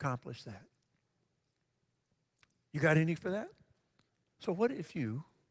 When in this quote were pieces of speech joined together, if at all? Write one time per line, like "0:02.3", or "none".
0:03.2
0:04.1